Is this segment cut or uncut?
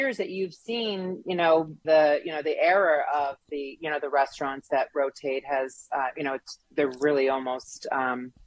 cut